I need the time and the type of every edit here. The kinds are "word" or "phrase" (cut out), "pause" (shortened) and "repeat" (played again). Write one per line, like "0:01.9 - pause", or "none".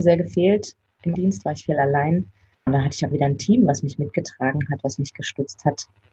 0:01.1 - word
0:02.7 - word
0:03.1 - word